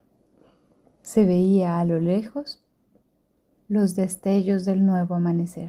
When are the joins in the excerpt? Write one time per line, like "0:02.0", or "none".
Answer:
none